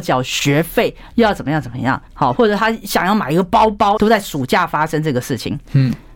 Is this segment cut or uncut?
cut